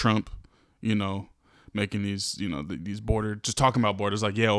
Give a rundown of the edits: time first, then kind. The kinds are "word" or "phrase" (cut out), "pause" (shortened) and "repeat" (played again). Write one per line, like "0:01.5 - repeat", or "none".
none